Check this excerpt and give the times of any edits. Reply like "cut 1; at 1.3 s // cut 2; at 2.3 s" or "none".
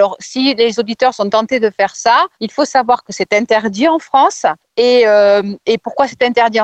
cut 1; at 2.3 s // cut 2; at 4.6 s